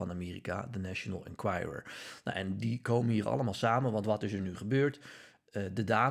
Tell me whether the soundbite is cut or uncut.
uncut